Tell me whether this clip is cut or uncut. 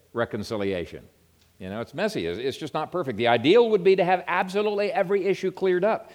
uncut